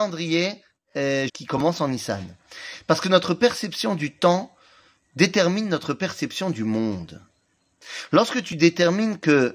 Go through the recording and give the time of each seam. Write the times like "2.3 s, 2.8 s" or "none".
1.3 s